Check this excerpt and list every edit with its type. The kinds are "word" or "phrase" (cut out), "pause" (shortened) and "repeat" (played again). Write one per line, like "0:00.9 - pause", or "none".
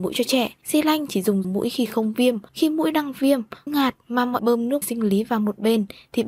0:01.4 - word
0:03.7 - word
0:04.4 - word
0:04.8 - word